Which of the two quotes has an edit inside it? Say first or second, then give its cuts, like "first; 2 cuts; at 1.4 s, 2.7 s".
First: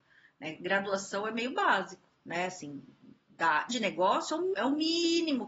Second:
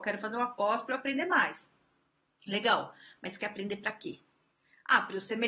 first; 2 cuts; at 3.7 s, 4.5 s